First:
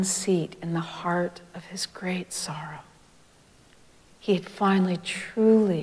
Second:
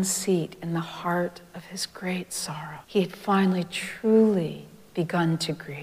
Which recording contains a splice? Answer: second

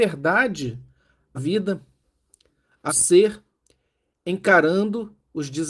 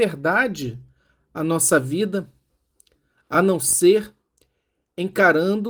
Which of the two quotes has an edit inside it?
first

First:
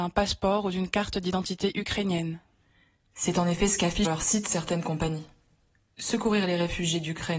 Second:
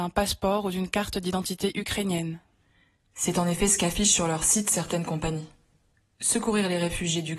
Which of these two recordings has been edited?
first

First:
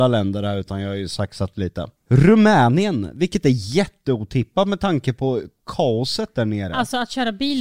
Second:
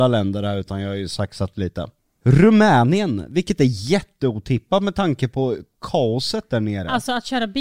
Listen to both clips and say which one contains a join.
first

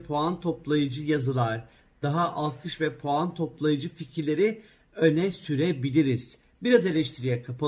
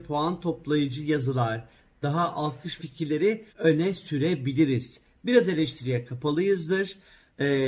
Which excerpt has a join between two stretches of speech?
second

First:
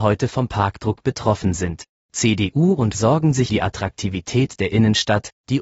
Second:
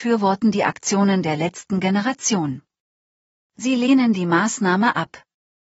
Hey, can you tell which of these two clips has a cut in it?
first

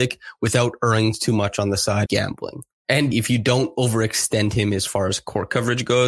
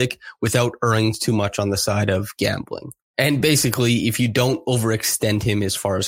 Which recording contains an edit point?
first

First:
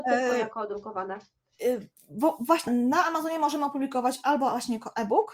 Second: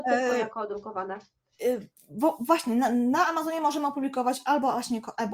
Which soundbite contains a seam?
first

